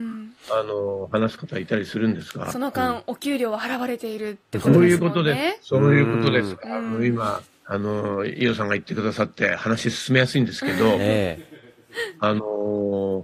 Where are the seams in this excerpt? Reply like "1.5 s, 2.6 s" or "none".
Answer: 7.5 s